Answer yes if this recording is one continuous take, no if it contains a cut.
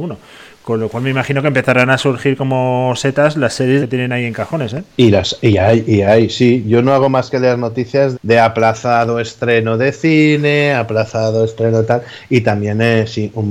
no